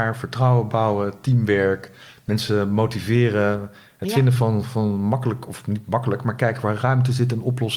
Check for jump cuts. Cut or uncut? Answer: uncut